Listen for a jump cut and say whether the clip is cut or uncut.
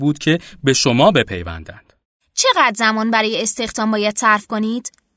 uncut